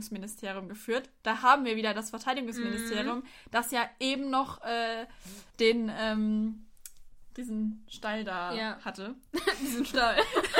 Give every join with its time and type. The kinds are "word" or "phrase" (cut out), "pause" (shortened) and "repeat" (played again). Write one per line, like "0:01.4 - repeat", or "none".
0:05.5 - pause